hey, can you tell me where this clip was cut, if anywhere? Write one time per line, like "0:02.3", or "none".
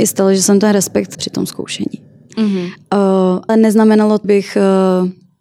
0:01.1
0:03.5
0:04.2